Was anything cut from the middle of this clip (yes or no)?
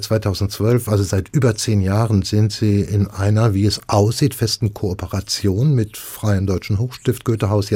no